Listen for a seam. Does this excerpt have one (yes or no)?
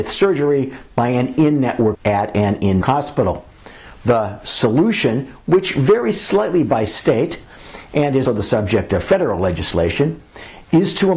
yes